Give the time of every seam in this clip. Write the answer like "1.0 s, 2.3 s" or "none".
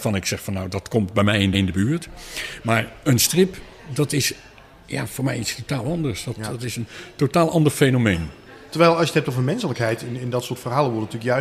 1.5 s